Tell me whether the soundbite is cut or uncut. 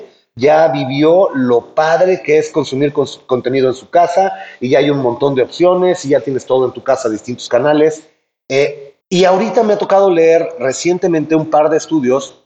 cut